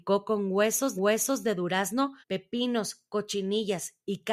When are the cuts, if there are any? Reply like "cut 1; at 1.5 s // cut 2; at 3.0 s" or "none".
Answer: cut 1; at 1.0 s // cut 2; at 2.2 s